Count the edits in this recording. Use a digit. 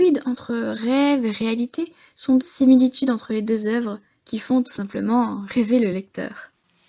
1